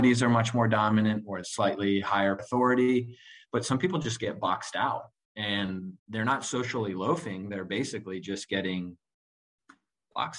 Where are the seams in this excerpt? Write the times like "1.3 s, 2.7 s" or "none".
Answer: 1.4 s, 2.4 s, 6.0 s